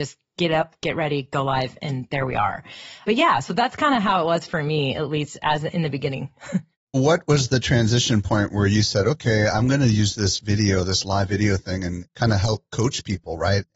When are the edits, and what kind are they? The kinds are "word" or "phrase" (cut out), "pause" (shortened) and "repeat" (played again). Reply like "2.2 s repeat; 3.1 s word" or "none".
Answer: 6.9 s word